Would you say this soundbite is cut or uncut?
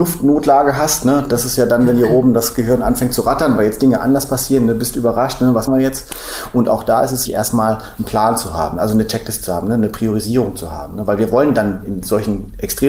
cut